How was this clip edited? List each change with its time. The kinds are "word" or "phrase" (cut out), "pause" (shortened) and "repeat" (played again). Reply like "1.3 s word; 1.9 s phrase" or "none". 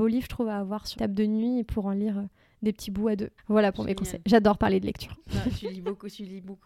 1.0 s word; 3.4 s pause

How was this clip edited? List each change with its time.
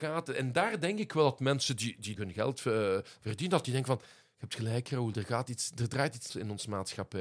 2.2 s word; 6.3 s phrase

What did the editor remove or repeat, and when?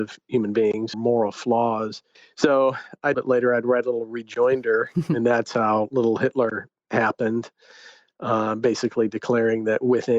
0.9 s phrase; 2.2 s pause; 3.1 s phrase

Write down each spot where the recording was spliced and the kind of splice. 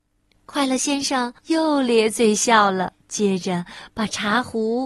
1.4 s pause; 3.0 s pause

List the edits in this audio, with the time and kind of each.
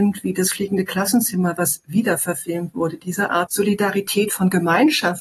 3.5 s word

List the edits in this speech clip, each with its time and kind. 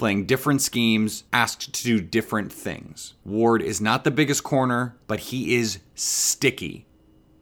1.3 s pause; 3.2 s pause; 5.0 s pause

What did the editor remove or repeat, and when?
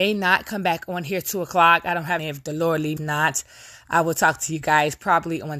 2.2 s phrase; 3.0 s phrase

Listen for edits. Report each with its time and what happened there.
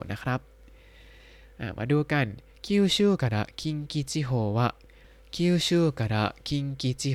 2.5 s pause

